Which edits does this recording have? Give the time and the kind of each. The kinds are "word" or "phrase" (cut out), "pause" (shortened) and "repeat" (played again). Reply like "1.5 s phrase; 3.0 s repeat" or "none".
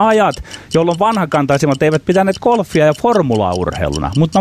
none